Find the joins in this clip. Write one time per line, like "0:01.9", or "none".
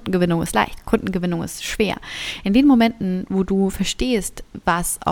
none